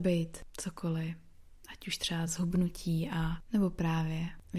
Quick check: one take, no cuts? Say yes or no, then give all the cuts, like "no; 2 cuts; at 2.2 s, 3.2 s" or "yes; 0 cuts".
yes; 0 cuts